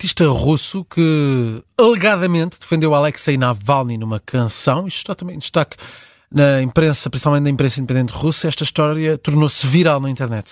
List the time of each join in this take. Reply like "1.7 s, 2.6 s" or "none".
none